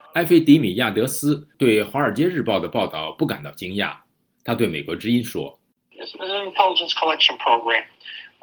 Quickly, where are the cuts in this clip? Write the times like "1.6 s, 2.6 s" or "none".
none